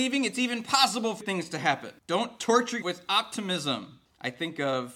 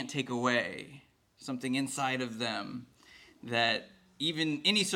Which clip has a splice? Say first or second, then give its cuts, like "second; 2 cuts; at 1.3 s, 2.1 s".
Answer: first; 2 cuts; at 1.2 s, 2.8 s